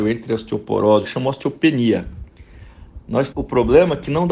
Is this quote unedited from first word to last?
no; 2 cuts; at 1.0 s, 3.3 s

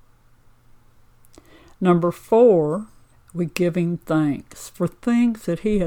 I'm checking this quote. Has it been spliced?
yes; 1 cut; at 3.1 s

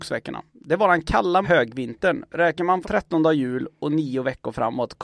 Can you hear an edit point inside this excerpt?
yes; 2 cuts; at 1.4 s, 2.8 s

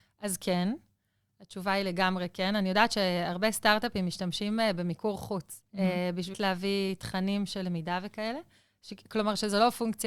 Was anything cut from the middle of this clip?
yes; 2 cuts; at 5.7 s, 6.3 s

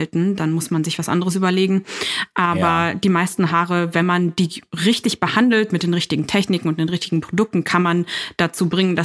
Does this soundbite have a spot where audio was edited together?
no; 0 cuts

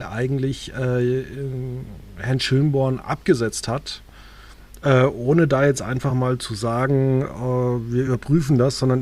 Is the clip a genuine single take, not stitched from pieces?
yes; 0 cuts

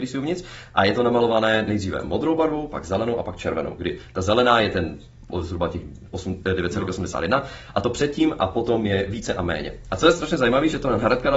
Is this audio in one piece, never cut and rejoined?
yes; 0 cuts

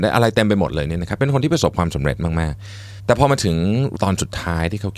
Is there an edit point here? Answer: yes; 2 cuts; at 3.0 s, 3.9 s

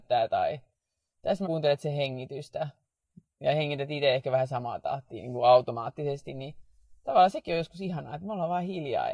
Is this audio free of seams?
no; 1 cut; at 1.4 s

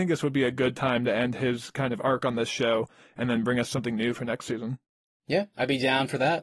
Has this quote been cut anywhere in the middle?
no; 0 cuts

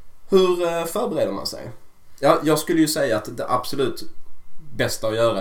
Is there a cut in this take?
no; 0 cuts

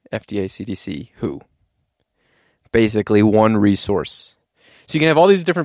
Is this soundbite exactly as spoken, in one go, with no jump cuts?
yes; 0 cuts

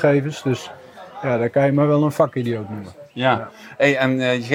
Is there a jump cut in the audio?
no; 0 cuts

